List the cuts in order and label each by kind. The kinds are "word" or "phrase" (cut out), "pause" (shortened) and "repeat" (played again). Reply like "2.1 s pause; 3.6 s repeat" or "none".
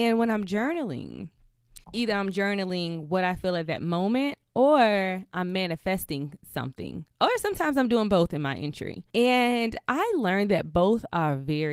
1.8 s pause; 9.1 s pause